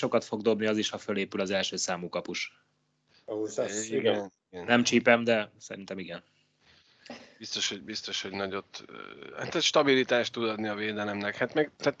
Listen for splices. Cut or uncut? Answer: uncut